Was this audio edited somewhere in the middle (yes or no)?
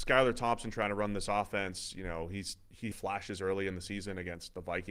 yes